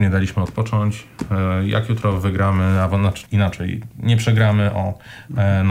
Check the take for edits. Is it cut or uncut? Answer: cut